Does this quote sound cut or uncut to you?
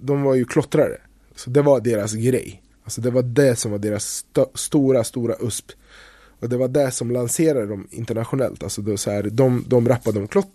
uncut